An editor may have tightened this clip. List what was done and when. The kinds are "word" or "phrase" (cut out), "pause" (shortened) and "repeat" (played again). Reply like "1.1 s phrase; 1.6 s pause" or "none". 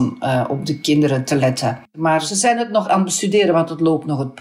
2.8 s word